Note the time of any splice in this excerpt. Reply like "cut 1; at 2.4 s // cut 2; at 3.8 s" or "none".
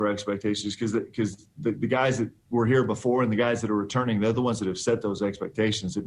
none